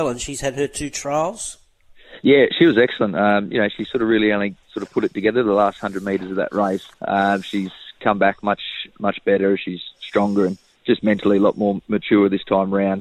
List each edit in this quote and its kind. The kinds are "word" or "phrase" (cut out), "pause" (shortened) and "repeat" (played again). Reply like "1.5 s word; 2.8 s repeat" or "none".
4.6 s pause; 6.9 s pause